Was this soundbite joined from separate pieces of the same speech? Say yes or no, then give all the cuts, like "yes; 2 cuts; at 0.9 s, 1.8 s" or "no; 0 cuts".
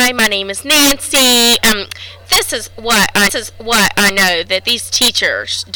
yes; 1 cut; at 3.3 s